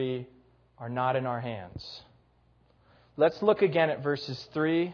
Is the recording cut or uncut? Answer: uncut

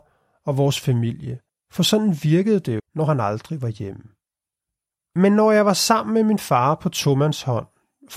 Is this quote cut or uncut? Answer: cut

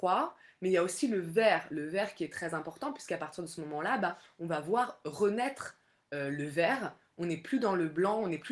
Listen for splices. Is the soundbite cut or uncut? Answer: uncut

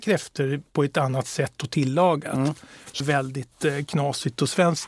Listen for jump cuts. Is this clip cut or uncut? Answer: cut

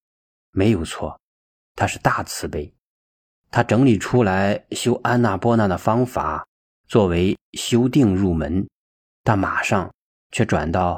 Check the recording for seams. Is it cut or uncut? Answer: uncut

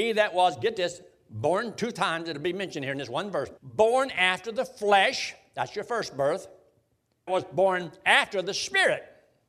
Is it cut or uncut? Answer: cut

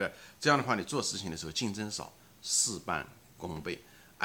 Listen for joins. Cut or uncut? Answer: uncut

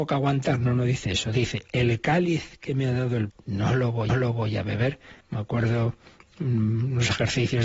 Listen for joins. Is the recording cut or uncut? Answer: cut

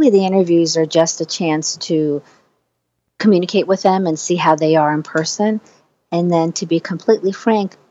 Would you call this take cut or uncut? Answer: uncut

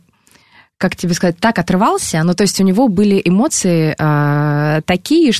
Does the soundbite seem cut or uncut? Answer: uncut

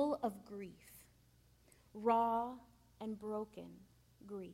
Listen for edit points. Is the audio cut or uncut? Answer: uncut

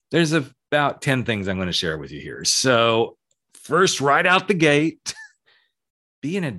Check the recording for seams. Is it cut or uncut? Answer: uncut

